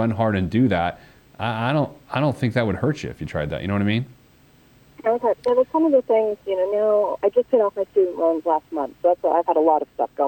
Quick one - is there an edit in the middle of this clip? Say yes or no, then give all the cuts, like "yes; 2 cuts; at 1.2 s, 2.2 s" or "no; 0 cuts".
no; 0 cuts